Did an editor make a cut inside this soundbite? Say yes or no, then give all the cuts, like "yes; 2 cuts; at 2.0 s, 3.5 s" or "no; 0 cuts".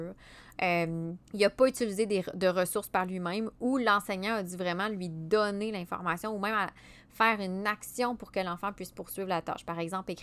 yes; 1 cut; at 1.2 s